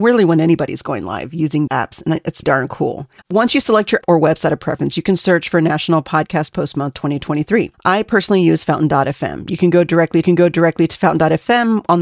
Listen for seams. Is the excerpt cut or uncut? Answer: cut